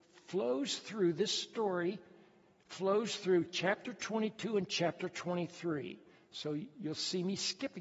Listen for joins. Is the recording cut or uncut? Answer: uncut